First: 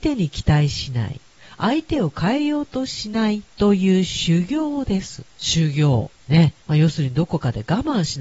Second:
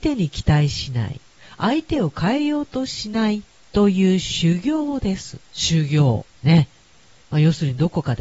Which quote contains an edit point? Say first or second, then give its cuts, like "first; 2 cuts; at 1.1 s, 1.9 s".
first; 2 cuts; at 3.5 s, 6.6 s